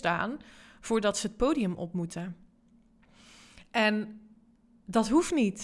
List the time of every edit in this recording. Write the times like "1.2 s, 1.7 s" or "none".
none